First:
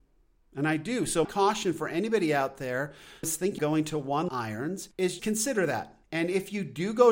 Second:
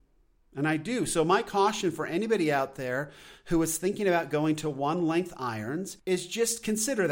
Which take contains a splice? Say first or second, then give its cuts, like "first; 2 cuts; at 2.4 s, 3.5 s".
first; 5 cuts; at 1.2 s, 3.2 s, 3.6 s, 4.3 s, 5.2 s